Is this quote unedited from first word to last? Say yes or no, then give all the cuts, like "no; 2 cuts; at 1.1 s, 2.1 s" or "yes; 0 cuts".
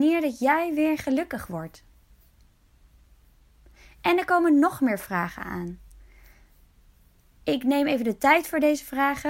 yes; 0 cuts